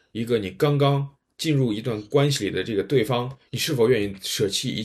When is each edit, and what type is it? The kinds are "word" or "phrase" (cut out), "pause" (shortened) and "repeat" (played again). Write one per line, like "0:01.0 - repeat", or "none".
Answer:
0:03.5 - pause